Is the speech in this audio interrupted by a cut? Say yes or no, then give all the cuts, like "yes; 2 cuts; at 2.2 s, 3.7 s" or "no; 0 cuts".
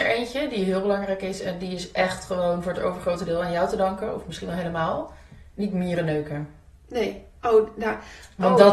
no; 0 cuts